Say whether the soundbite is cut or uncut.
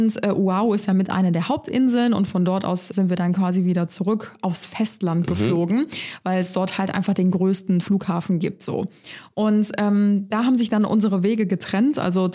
cut